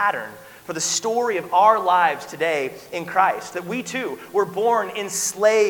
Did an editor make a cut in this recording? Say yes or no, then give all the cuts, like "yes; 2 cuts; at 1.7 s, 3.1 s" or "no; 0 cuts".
no; 0 cuts